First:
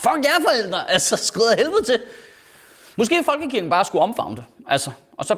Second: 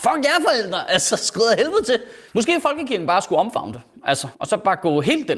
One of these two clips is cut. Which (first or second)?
second